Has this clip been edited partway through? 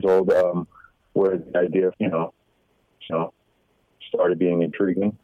yes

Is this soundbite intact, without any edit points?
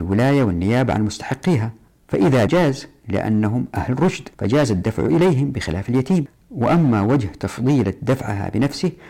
no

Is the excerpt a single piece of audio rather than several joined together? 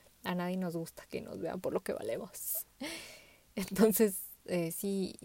yes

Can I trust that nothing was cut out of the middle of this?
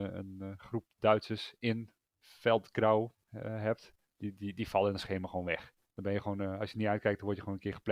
yes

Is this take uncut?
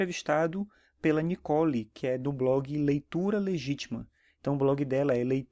yes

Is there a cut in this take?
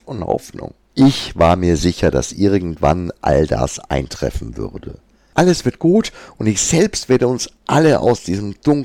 no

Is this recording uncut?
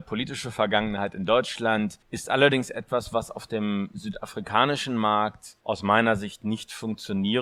no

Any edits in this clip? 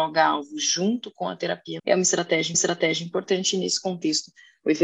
yes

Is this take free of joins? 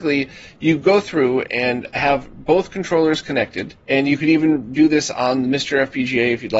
no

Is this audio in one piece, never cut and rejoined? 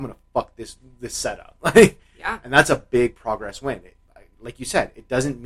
yes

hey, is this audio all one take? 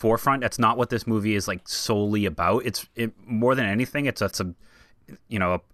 no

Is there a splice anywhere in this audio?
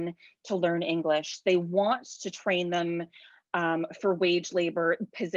no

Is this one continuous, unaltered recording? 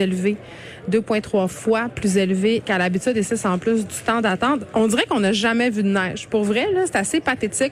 yes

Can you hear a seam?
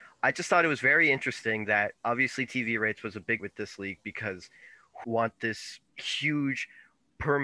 yes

